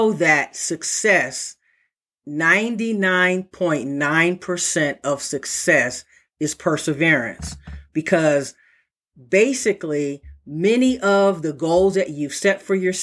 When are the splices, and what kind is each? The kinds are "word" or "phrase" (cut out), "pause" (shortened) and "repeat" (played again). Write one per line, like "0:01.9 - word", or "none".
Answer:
none